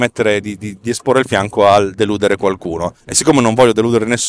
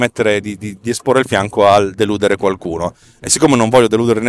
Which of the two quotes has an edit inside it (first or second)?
first